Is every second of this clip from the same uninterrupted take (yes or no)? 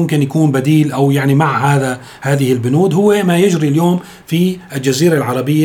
yes